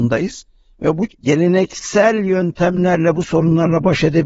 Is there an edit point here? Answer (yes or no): yes